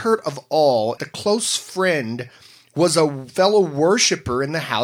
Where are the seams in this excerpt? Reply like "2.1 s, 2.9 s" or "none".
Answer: 1.0 s